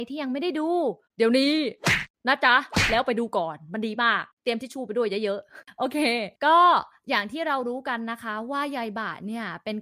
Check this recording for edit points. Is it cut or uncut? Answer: cut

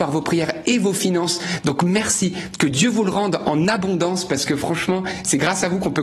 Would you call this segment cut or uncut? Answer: uncut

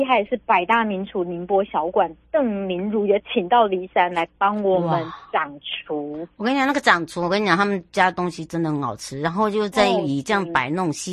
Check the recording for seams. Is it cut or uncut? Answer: uncut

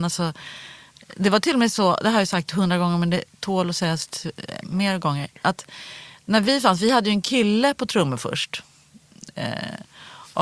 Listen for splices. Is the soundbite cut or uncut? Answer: uncut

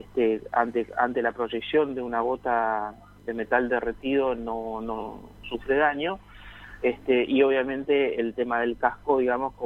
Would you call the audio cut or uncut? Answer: cut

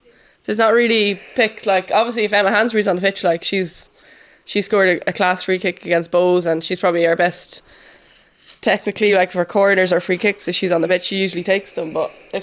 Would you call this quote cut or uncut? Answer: uncut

